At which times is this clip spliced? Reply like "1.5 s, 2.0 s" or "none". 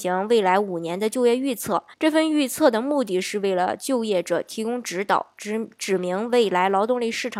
1.9 s